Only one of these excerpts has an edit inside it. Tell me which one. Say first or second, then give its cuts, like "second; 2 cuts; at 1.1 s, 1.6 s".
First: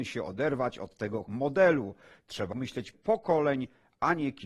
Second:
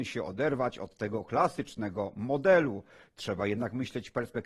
first; 3 cuts; at 1.3 s, 2.5 s, 2.9 s